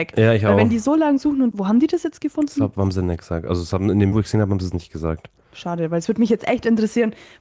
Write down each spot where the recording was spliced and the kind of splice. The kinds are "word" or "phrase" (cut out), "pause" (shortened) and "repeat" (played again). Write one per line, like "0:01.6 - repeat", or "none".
0:01.5 - word
0:04.1 - word